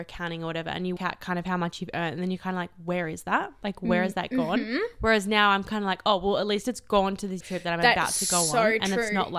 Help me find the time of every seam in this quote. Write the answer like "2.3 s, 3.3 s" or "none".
1.0 s, 7.4 s